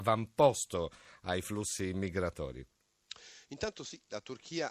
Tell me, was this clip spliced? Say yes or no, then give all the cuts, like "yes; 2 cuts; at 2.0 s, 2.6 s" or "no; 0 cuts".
no; 0 cuts